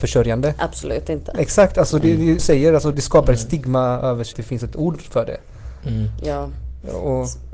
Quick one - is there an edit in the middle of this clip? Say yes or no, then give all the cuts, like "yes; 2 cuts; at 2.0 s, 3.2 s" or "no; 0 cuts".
yes; 3 cuts; at 2.4 s, 2.9 s, 4.3 s